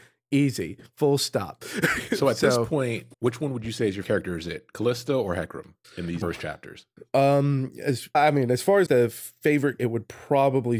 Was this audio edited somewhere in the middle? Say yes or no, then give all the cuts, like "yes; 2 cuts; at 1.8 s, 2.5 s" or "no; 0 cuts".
yes; 7 cuts; at 3.1 s, 4.0 s, 5.8 s, 6.2 s, 8.1 s, 8.9 s, 9.8 s